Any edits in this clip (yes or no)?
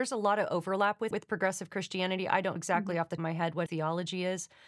yes